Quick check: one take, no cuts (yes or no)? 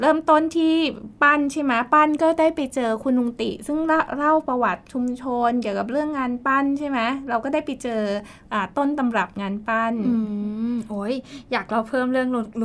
yes